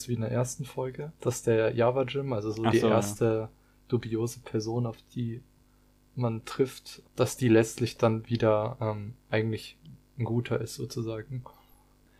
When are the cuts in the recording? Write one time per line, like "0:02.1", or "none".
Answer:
0:01.2